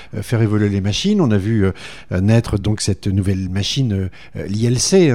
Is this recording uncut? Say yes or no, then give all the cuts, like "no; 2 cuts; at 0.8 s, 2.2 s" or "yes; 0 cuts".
yes; 0 cuts